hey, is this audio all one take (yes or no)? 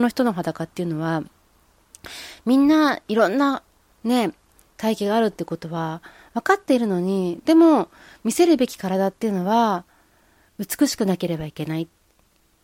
yes